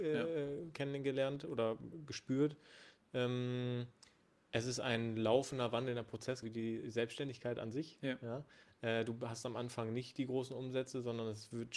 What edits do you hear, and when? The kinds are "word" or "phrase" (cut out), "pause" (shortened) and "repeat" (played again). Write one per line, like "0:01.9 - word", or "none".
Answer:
0:06.4 - word